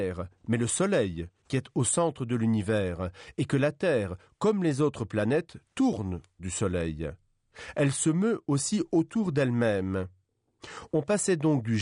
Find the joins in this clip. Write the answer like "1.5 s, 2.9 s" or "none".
6.4 s